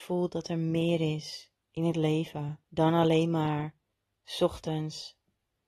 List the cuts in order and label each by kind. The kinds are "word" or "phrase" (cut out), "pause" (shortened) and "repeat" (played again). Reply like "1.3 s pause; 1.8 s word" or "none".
1.6 s pause; 2.6 s pause; 3.9 s pause

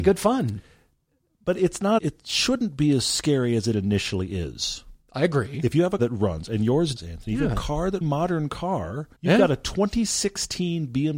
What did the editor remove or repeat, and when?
2.0 s word; 5.0 s pause; 6.0 s word; 7.0 s word; 8.0 s phrase; 9.2 s pause

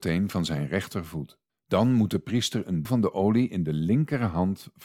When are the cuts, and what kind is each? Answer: 1.5 s pause; 2.8 s word

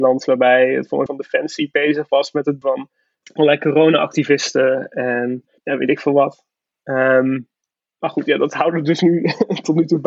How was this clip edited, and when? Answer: 1.1 s word; 2.6 s word; 3.2 s word; 5.6 s word

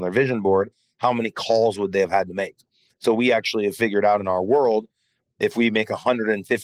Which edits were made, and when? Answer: none

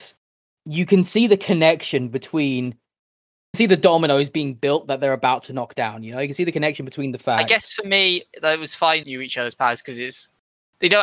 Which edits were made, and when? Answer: 3.5 s phrase; 9.0 s phrase

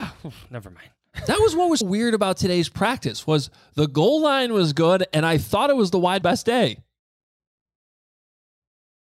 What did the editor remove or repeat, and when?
1.8 s word; 6.2 s word

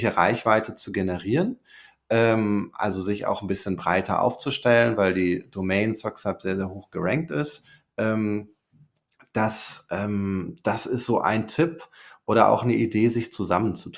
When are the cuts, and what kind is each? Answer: none

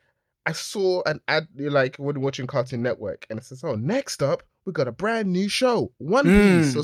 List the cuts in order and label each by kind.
4.5 s pause

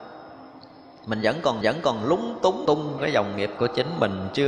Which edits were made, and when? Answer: 1.6 s repeat; 2.6 s word; 3.0 s phrase; 3.6 s word

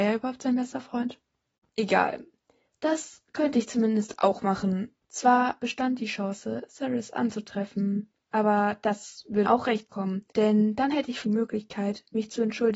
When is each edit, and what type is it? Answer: 2.6 s pause; 5.0 s pause; 8.2 s pause; 9.4 s word; 10.3 s pause; 11.2 s word

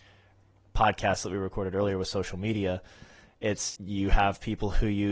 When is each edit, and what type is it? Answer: 3.7 s word

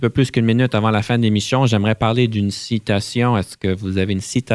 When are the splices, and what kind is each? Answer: none

